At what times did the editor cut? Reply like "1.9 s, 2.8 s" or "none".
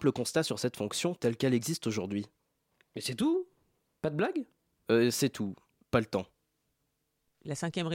none